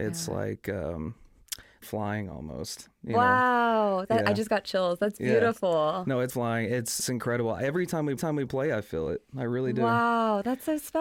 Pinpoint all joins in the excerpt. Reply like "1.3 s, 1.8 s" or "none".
1.8 s, 6.3 s, 7.0 s, 8.2 s